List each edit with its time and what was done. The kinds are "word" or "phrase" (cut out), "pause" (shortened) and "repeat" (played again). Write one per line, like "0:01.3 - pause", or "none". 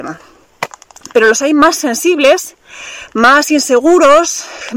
none